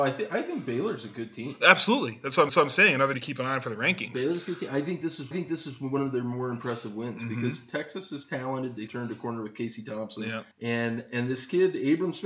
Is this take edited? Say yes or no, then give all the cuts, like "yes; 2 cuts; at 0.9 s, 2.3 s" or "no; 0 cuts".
yes; 5 cuts; at 2.5 s, 3.1 s, 5.3 s, 8.9 s, 10.5 s